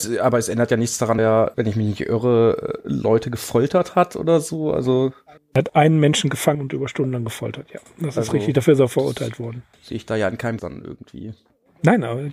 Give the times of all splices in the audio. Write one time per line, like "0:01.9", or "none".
0:01.2
0:01.5
0:05.4
0:05.7
0:06.5
0:09.7
0:10.6